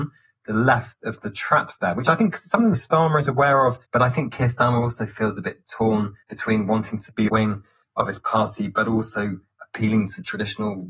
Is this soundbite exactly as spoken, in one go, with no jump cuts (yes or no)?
no